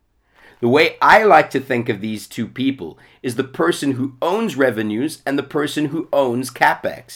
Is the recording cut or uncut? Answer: uncut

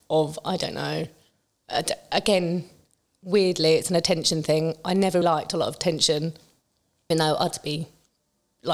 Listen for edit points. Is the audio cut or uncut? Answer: cut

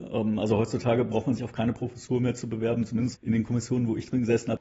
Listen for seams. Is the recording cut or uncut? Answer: cut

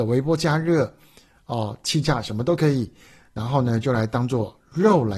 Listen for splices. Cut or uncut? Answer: uncut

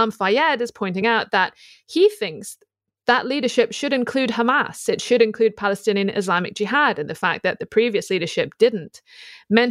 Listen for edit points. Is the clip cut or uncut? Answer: uncut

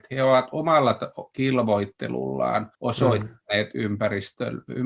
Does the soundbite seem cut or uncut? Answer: cut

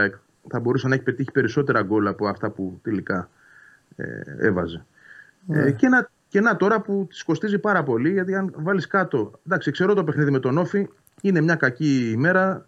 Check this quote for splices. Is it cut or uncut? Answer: uncut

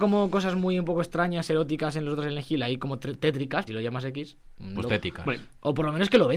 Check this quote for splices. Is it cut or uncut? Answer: cut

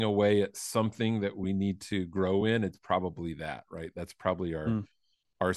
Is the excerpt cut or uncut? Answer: uncut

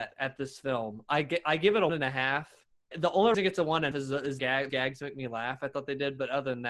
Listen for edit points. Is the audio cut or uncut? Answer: cut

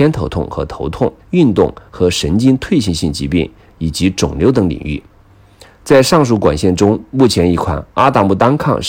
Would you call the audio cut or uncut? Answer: cut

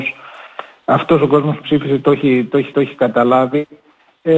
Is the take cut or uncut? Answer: cut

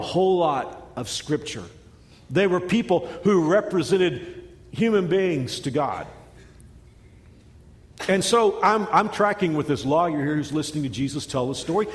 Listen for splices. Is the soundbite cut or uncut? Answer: uncut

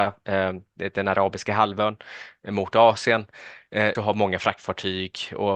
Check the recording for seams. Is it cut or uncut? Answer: cut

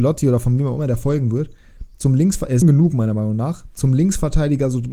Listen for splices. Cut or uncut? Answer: cut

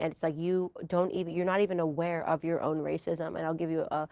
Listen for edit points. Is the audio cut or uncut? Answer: uncut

